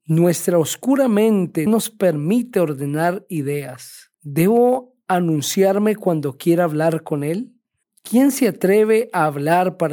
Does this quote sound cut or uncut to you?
cut